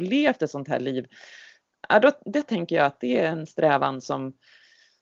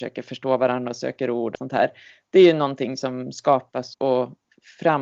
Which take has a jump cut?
second; 2 cuts; at 1.5 s, 3.9 s

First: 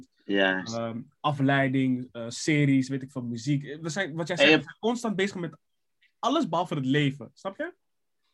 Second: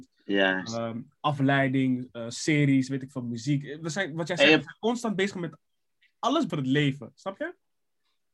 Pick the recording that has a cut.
second; 1 cut; at 6.5 s

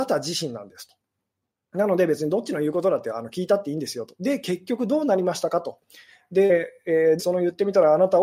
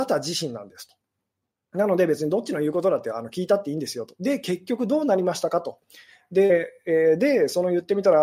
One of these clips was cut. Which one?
first; 1 cut; at 7.2 s

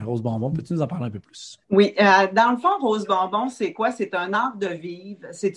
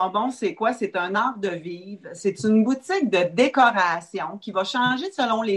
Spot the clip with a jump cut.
first; 1 cut; at 1.6 s

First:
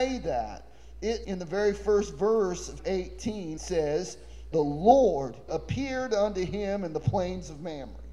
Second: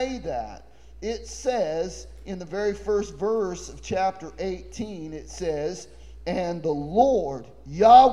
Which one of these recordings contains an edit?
first; 5 cuts; at 1.2 s, 2.8 s, 3.6 s, 4.5 s, 5.5 s

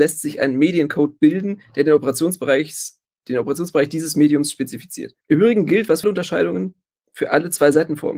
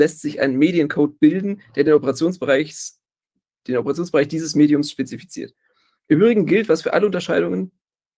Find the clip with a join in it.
first; 4 cuts; at 3.1 s, 5.2 s, 6.0 s, 7.0 s

